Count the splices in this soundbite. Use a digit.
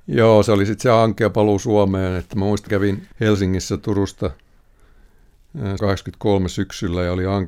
3